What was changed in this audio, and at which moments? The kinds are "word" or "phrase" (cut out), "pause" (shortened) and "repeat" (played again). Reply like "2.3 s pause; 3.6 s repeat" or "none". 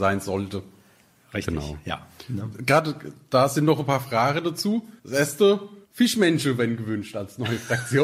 5.0 s pause; 5.8 s pause

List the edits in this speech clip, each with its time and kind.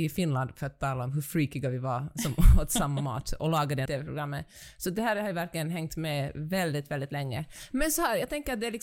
3.9 s phrase

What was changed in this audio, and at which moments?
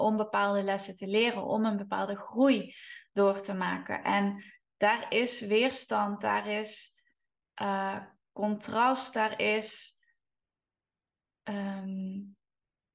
none

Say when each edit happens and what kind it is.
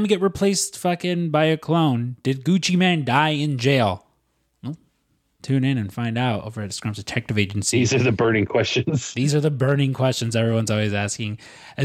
none

